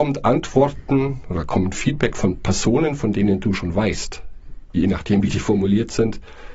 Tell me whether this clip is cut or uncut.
uncut